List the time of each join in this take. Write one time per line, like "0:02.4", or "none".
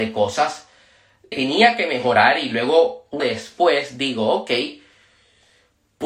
0:01.3
0:03.2